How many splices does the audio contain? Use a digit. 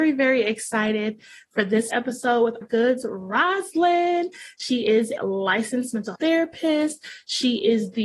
5